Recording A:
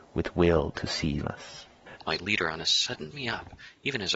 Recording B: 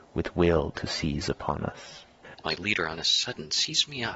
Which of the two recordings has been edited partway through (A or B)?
A